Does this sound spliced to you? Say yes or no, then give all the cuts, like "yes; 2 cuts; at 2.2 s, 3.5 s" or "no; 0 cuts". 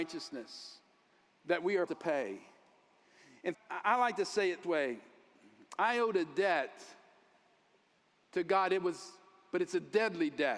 yes; 3 cuts; at 1.9 s, 3.5 s, 4.6 s